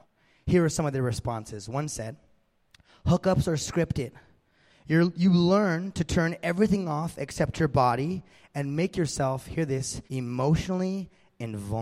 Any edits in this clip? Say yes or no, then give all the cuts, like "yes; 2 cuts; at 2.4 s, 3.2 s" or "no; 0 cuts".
yes; 1 cut; at 10.1 s